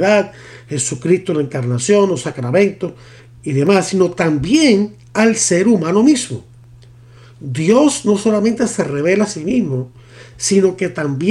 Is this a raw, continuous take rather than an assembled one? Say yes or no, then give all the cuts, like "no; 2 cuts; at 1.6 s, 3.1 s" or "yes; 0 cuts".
yes; 0 cuts